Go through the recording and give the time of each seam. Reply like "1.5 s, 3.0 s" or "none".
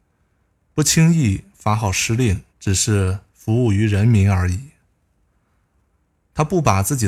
2.5 s